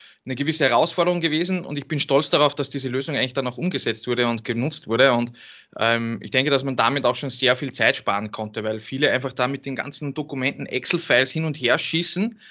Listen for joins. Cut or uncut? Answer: uncut